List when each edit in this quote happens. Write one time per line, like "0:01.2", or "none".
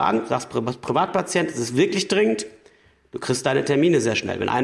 none